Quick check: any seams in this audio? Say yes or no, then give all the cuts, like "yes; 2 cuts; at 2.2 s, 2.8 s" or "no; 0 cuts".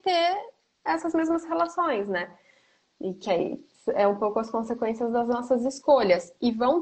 no; 0 cuts